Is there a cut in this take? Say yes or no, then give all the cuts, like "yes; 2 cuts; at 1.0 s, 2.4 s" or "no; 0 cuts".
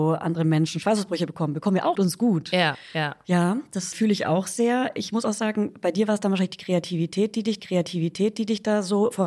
yes; 3 cuts; at 1.9 s, 3.9 s, 7.6 s